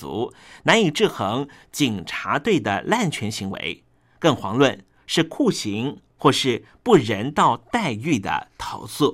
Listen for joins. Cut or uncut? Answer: uncut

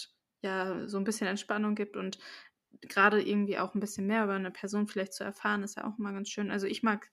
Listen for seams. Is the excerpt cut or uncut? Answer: uncut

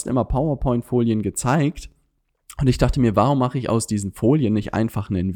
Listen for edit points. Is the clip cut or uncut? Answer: uncut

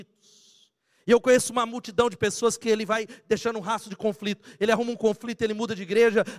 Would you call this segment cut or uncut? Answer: uncut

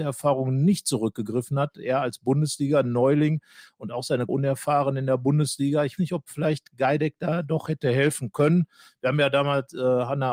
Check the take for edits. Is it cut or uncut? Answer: cut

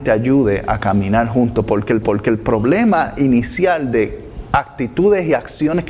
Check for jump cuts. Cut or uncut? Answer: cut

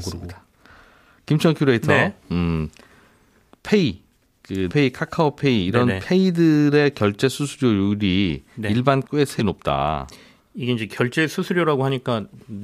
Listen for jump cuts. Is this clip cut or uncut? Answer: cut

